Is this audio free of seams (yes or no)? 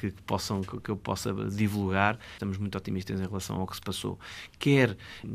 yes